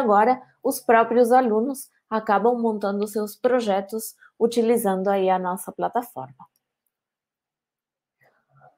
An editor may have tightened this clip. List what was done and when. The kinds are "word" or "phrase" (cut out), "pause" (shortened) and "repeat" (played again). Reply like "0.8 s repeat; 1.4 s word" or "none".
none

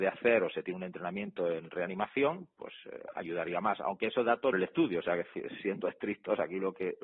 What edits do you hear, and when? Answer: 4.5 s phrase

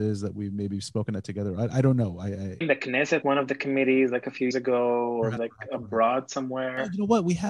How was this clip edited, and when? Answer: 2.6 s word; 3.2 s word; 4.5 s word; 5.4 s word

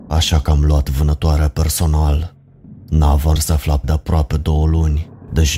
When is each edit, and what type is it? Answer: 3.4 s word; 3.8 s word

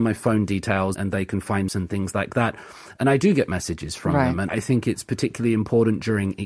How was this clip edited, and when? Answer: 0.9 s word; 1.7 s phrase; 4.5 s word

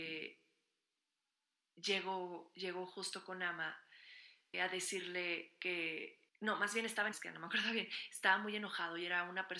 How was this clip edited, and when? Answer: 4.5 s word; 6.3 s pause; 7.1 s word

